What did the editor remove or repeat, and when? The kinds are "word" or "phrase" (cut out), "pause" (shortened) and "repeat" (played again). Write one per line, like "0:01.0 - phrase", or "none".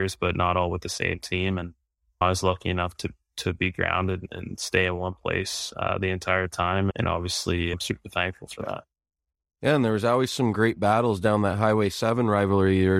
none